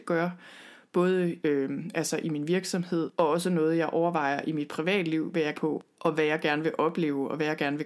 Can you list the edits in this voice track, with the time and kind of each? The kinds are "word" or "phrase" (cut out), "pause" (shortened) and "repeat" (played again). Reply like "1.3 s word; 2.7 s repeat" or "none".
1.4 s phrase; 5.5 s phrase